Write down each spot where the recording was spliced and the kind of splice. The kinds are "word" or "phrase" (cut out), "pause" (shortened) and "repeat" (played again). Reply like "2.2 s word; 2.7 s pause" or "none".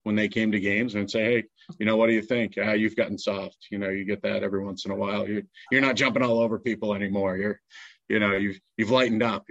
none